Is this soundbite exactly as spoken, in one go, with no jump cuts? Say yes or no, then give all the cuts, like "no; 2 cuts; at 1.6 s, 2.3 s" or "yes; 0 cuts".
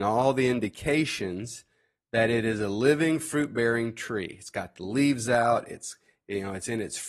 yes; 0 cuts